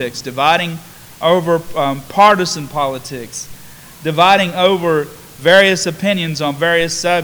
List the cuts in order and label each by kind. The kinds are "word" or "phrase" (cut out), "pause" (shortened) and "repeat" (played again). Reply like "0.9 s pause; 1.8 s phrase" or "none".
none